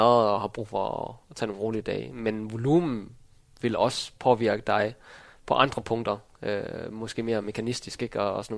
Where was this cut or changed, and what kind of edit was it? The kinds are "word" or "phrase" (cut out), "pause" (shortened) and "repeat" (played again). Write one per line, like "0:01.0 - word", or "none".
none